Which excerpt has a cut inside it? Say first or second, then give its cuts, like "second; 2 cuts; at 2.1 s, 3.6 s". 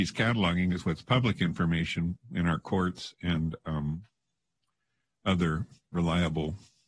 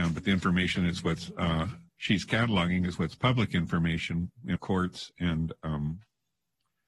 second; 2 cuts; at 1.9 s, 4.6 s